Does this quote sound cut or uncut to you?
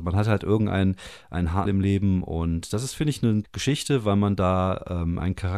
cut